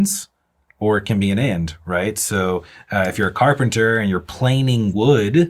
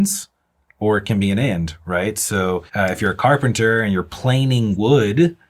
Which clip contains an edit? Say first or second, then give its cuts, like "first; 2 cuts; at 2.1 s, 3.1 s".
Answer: second; 1 cut; at 2.7 s